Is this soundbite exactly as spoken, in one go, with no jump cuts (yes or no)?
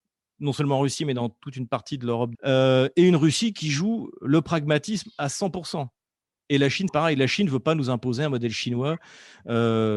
no